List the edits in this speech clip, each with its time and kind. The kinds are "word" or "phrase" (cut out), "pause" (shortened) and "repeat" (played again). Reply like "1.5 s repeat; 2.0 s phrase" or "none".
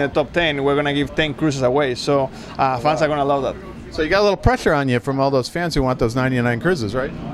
none